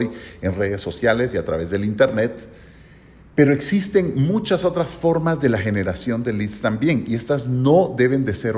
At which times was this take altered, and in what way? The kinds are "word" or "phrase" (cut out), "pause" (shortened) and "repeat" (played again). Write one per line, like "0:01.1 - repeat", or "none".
none